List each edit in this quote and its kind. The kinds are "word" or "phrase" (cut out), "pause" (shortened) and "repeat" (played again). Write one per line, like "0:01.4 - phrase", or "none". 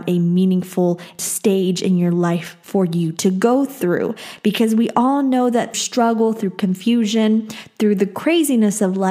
0:01.2 - phrase
0:05.7 - word